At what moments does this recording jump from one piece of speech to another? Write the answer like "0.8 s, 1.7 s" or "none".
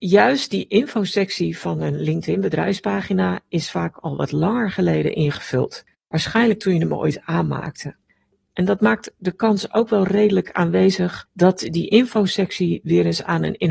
none